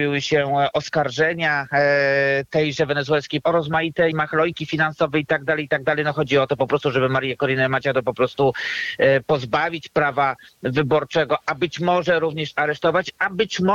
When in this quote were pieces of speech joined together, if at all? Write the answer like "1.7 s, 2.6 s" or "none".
3.4 s, 4.1 s